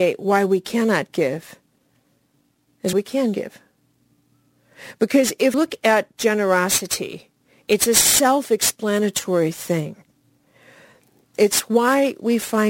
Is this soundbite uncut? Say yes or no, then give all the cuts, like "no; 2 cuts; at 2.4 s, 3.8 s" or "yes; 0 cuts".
no; 2 cuts; at 2.9 s, 5.5 s